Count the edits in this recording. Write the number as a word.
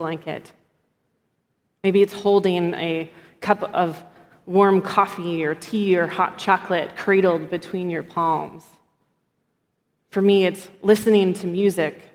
zero